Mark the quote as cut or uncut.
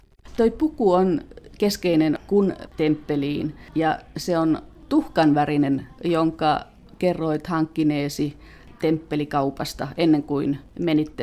cut